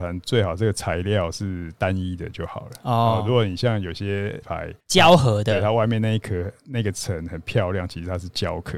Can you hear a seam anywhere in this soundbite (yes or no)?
yes